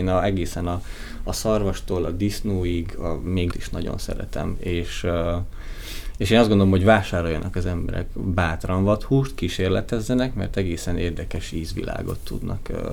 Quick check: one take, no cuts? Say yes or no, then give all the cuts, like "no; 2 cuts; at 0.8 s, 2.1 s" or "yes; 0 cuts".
no; 1 cut; at 3.5 s